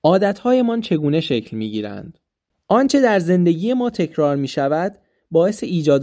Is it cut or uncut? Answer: uncut